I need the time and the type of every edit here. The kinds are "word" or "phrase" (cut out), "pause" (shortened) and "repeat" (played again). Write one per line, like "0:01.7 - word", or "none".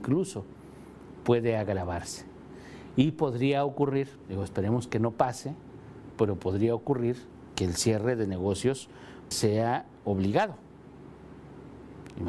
0:06.1 - word
0:09.3 - word